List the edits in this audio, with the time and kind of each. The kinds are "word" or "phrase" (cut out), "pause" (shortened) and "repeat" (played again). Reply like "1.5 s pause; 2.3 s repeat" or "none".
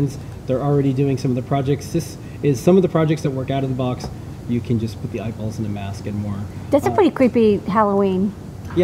none